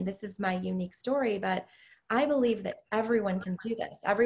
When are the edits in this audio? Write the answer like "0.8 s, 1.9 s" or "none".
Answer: none